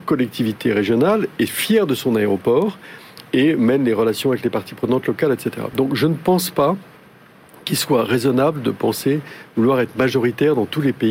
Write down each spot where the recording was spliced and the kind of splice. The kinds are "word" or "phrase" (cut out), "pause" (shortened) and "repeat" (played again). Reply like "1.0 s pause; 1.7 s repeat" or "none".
none